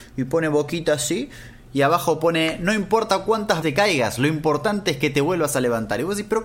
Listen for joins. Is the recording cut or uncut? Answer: cut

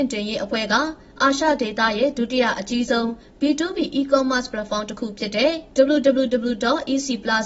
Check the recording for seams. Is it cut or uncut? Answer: uncut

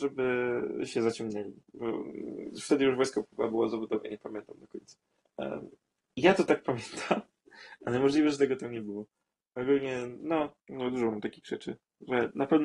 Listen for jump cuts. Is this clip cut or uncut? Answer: cut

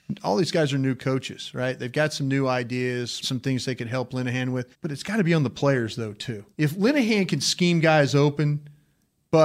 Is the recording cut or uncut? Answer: cut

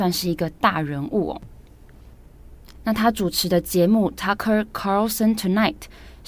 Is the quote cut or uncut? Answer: uncut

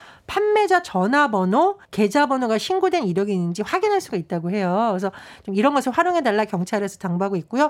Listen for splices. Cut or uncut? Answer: cut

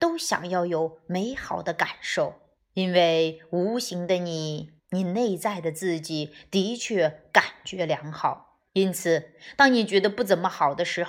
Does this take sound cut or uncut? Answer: cut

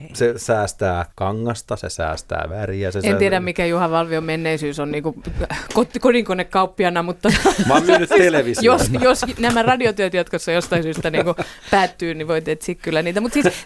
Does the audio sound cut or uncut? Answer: cut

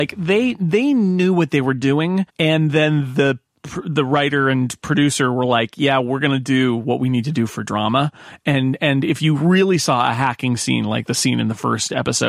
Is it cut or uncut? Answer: cut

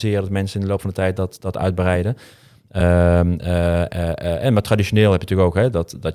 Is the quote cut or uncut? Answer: uncut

